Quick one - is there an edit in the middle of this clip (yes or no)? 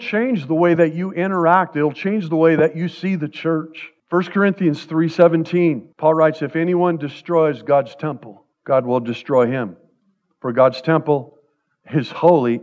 yes